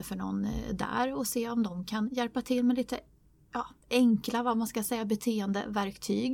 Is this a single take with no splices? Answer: yes; 0 cuts

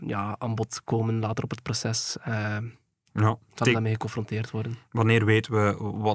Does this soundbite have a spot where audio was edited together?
no; 0 cuts

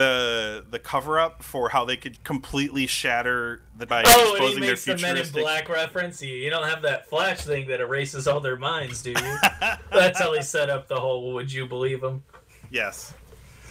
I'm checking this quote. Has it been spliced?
yes; 2 cuts; at 2.1 s, 3.9 s

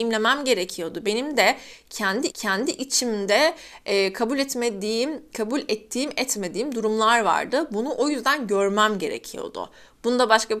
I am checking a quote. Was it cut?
yes; 1 cut; at 2.3 s

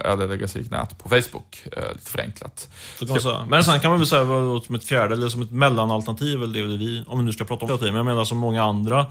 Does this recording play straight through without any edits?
no; 1 cut; at 7.7 s

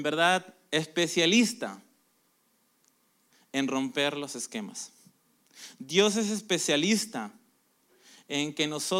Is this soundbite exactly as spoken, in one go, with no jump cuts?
yes; 0 cuts

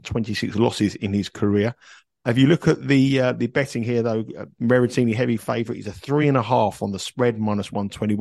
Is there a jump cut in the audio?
no; 0 cuts

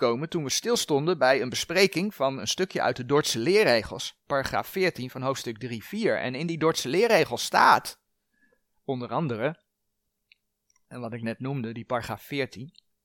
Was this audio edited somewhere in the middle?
no; 0 cuts

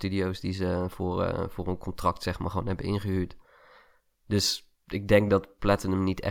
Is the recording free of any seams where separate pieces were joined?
yes; 0 cuts

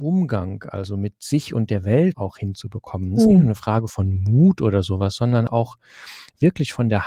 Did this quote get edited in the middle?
yes; 2 cuts; at 2.1 s, 5.5 s

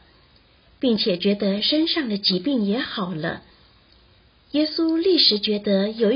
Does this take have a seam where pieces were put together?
no; 0 cuts

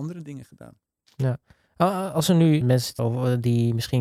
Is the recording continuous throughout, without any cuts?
no; 2 cuts; at 2.6 s, 3.0 s

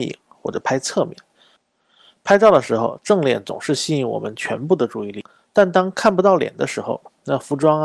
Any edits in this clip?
no; 0 cuts

